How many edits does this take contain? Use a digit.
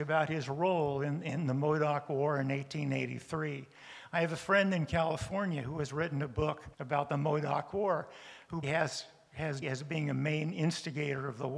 3